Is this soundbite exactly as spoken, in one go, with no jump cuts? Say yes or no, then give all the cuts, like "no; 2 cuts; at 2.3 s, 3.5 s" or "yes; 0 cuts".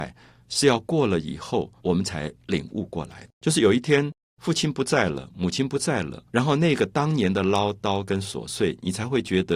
no; 3 cuts; at 1.8 s, 3.3 s, 6.3 s